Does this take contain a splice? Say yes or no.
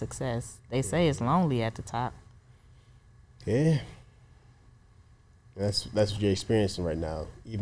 no